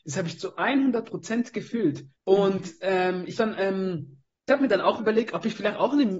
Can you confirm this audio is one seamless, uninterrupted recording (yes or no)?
no